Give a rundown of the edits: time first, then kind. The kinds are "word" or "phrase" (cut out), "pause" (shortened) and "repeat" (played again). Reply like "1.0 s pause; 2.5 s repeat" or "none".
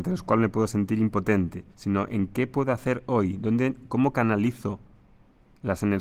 1.7 s pause